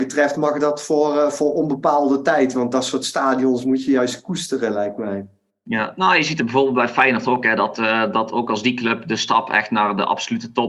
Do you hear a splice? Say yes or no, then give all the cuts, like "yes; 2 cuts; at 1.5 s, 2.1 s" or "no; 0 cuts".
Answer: no; 0 cuts